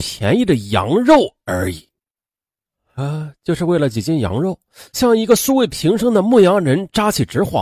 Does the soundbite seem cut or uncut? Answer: uncut